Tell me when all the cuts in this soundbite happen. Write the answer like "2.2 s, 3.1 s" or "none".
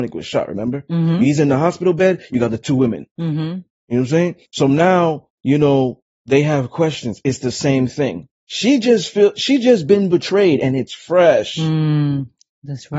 4.4 s, 5.4 s